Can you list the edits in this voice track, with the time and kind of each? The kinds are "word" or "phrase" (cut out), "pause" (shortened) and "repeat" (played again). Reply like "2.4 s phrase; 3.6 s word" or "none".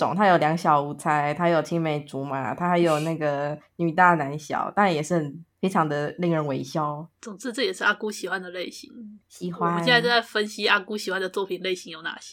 5.5 s pause; 7.1 s pause; 9.2 s pause